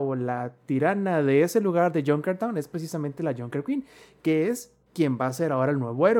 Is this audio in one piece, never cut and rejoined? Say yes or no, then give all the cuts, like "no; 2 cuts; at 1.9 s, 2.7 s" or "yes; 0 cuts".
no; 1 cut; at 4.8 s